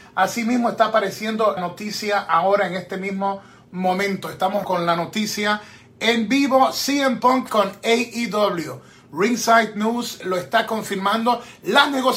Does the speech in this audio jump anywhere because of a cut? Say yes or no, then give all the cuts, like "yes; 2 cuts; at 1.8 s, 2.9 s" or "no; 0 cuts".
yes; 4 cuts; at 1.6 s, 4.6 s, 7.5 s, 10.2 s